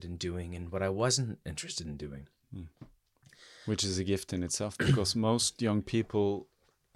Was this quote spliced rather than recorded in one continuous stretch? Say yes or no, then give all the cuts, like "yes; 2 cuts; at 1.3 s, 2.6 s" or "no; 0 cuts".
no; 0 cuts